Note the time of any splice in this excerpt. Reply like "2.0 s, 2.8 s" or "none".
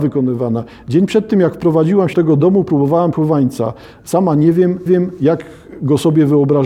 2.1 s, 3.1 s, 4.9 s